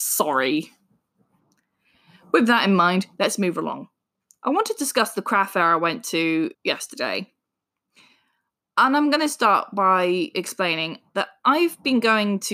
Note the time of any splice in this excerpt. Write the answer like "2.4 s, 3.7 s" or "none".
6.5 s